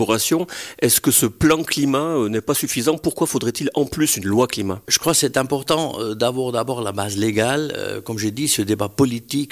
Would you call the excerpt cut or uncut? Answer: cut